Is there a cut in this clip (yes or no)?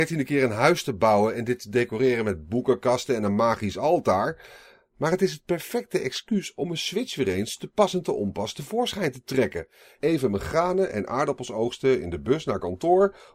no